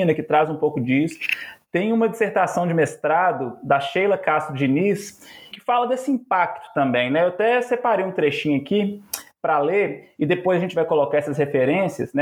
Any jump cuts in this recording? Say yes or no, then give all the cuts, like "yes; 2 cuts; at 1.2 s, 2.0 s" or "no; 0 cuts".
yes; 1 cut; at 5.5 s